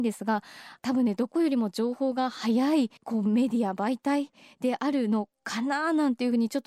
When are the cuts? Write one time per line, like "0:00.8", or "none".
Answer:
0:03.0